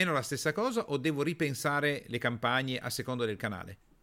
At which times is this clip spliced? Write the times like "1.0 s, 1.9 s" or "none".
none